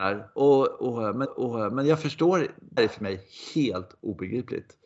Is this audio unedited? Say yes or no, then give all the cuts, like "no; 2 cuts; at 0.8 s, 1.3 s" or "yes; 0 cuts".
no; 2 cuts; at 1.2 s, 2.8 s